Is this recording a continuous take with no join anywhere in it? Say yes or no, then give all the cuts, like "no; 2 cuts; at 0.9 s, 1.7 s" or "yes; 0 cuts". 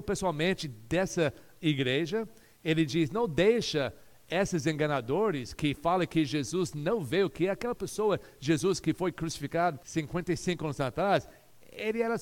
no; 1 cut; at 9.8 s